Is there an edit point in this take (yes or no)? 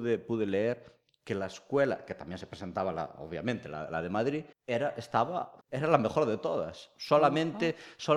yes